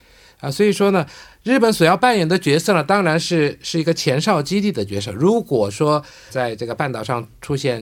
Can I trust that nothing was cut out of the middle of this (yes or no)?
no